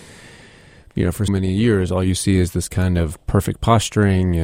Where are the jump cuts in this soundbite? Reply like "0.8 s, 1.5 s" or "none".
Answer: 1.3 s